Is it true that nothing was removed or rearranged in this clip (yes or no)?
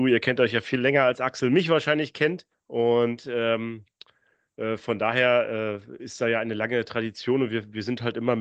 no